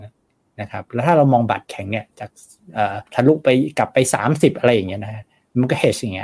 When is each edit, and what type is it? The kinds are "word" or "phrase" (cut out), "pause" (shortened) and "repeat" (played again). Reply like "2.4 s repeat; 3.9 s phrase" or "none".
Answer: 3.1 s pause